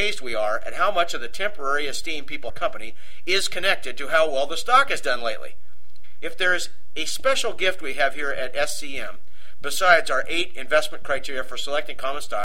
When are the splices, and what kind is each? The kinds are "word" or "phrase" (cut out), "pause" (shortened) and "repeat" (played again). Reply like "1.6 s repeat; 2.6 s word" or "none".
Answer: 2.5 s phrase